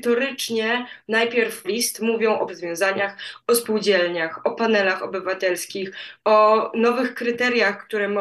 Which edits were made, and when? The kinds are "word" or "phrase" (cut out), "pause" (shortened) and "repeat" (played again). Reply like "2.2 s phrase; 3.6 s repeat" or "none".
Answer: 1.6 s word; 2.5 s word